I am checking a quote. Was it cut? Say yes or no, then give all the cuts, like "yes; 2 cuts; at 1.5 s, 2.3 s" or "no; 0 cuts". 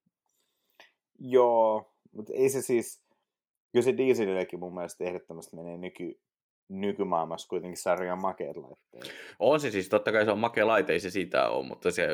no; 0 cuts